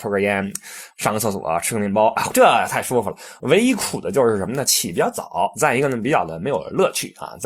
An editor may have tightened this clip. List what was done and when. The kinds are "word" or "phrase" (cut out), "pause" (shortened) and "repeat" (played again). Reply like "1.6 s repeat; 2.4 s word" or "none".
2.3 s phrase